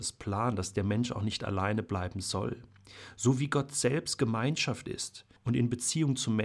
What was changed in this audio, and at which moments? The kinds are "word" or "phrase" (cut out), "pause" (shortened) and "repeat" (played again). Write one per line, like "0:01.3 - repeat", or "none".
0:05.4 - pause